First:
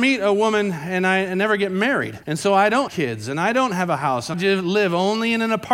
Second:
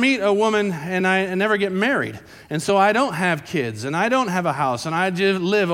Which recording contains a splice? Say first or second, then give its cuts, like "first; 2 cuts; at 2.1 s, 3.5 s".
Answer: first; 3 cuts; at 2.2 s, 2.9 s, 4.3 s